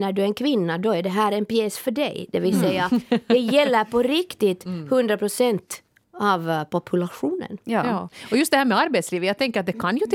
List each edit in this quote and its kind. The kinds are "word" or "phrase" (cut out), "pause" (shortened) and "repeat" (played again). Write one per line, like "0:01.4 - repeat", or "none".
none

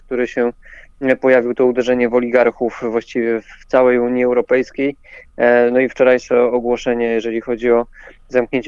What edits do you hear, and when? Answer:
none

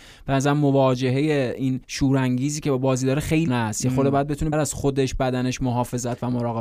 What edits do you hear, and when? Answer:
0:01.8 - pause
0:03.5 - word
0:04.5 - word

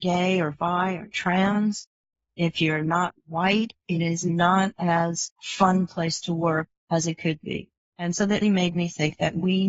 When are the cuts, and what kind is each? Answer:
0:08.4 - word

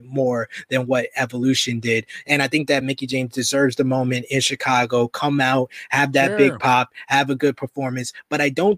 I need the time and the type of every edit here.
none

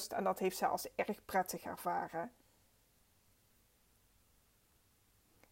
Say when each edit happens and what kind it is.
none

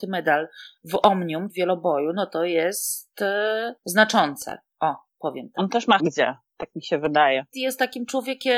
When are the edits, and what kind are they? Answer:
0:01.5 - word
0:03.8 - pause
0:05.1 - pause
0:06.0 - phrase

